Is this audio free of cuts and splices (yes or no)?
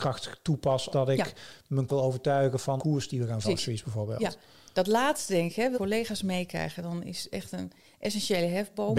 no